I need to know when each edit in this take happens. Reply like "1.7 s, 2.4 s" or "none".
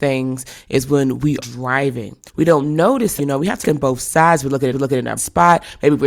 1.4 s, 2.3 s, 3.2 s, 3.6 s, 4.7 s, 5.2 s